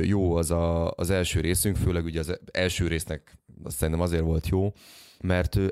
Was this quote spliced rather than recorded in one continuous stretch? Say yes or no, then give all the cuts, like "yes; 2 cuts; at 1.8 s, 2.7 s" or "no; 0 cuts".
no; 0 cuts